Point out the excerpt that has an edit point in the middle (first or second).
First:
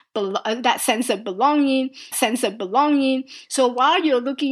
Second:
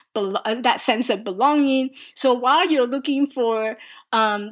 first